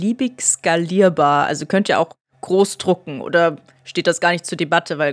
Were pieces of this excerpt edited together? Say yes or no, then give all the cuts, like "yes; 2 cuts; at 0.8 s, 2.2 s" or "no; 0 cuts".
no; 0 cuts